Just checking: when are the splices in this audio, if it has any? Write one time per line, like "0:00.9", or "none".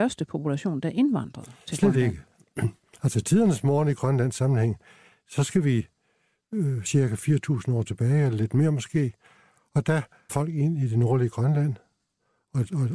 0:10.3